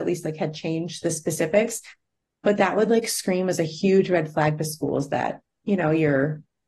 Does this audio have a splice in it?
no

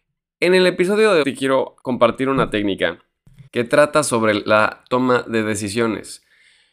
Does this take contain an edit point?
yes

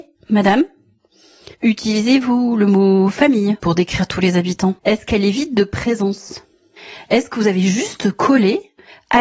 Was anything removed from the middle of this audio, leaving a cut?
yes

